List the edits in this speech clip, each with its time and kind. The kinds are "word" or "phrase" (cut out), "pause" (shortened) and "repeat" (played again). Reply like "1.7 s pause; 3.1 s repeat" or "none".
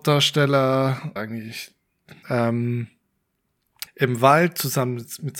1.2 s word; 2.2 s word; 3.9 s word